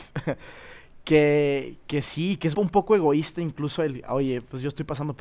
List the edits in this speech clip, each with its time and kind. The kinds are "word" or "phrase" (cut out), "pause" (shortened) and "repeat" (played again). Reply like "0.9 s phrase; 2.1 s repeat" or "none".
2.5 s word